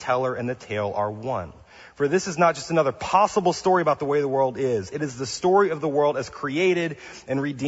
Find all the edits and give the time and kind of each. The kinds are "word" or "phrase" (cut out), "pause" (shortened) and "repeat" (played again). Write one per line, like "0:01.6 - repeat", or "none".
none

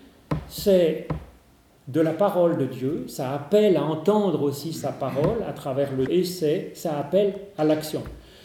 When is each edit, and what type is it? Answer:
0:06.1 - word

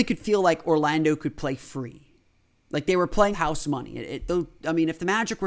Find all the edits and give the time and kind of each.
0:02.5 - pause
0:03.3 - word

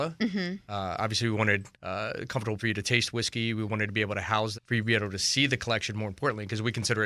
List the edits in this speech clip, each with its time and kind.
0:01.7 - pause
0:02.6 - word
0:04.5 - phrase

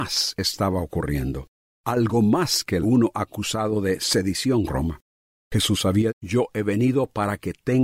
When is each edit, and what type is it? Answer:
0:02.8 - phrase
0:04.7 - word
0:06.1 - word

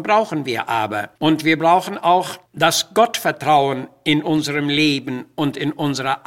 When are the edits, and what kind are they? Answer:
0:01.2 - pause
0:02.5 - pause

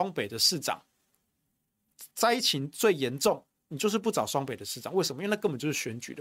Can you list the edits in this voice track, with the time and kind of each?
0:02.1 - pause

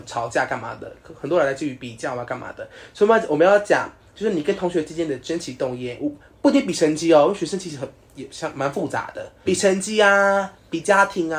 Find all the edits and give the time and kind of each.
0:09.5 - word

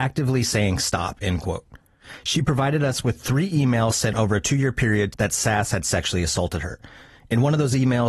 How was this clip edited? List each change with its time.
0:05.1 - phrase

